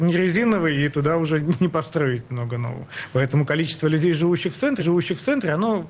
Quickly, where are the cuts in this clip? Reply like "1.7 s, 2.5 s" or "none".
4.8 s